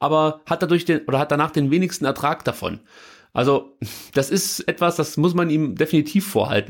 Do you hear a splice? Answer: no; 0 cuts

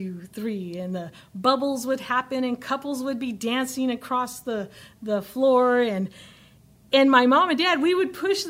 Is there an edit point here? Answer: no; 0 cuts

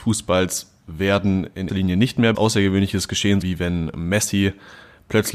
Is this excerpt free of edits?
no; 3 cuts; at 1.7 s, 2.3 s, 3.4 s

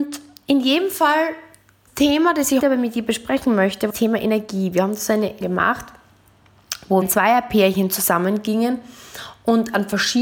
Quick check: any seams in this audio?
yes; 5 cuts; at 1.9 s, 2.6 s, 3.9 s, 5.4 s, 7.0 s

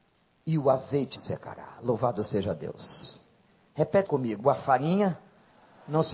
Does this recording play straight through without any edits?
no; 2 cuts; at 1.2 s, 4.1 s

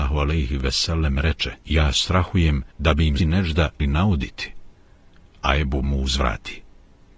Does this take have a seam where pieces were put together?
yes; 5 cuts; at 1.6 s, 2.7 s, 3.2 s, 3.8 s, 5.8 s

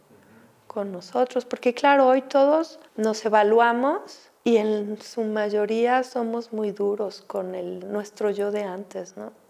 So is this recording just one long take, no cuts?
no; 2 cuts; at 2.9 s, 4.4 s

